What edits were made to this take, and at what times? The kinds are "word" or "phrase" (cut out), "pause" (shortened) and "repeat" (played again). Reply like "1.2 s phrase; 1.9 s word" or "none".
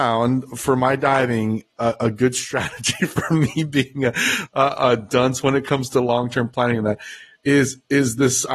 none